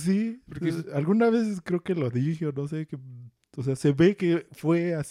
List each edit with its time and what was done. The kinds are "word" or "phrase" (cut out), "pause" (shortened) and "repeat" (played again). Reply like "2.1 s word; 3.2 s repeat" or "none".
none